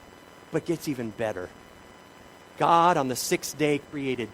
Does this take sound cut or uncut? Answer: uncut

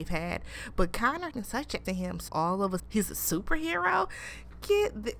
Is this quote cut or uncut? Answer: cut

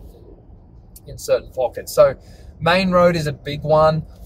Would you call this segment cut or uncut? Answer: uncut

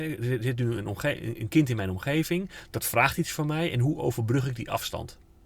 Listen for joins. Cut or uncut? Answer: uncut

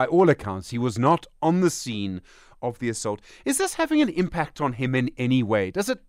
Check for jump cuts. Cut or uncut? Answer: uncut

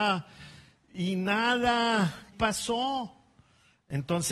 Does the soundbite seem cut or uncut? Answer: cut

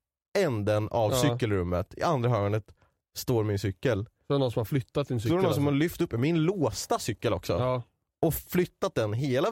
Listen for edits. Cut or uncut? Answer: uncut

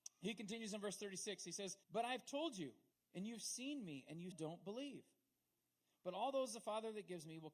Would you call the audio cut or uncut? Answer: cut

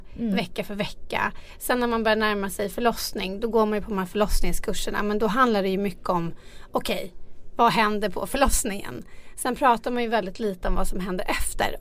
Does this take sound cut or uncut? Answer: uncut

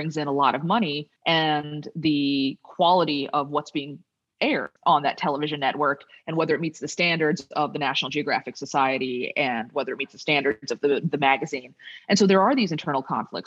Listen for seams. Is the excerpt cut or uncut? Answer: cut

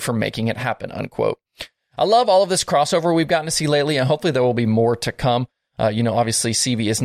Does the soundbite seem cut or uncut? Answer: uncut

